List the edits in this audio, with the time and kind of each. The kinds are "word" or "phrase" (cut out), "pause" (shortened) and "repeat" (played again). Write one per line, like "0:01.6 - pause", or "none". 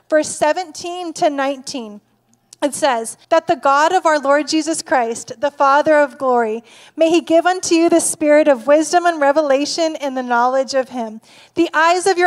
0:03.2 - pause